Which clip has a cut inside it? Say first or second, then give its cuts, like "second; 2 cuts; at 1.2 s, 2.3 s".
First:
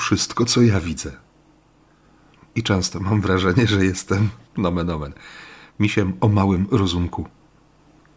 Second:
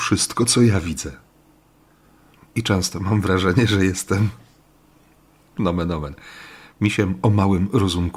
first; 1 cut; at 4.4 s